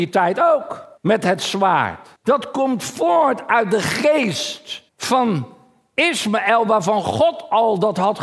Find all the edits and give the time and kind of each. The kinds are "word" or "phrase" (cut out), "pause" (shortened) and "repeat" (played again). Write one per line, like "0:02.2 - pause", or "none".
0:01.0 - pause
0:02.2 - pause
0:04.9 - pause